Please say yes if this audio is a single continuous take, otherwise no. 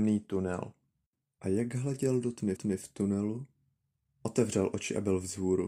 no